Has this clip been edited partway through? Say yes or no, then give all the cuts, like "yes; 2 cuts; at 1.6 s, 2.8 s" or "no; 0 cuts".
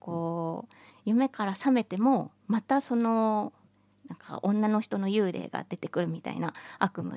no; 0 cuts